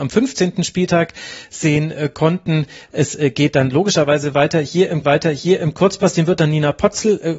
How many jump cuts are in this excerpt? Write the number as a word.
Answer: one